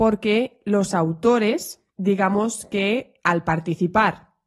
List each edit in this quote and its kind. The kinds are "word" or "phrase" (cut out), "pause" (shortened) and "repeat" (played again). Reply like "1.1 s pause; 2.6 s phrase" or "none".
1.9 s pause; 3.2 s pause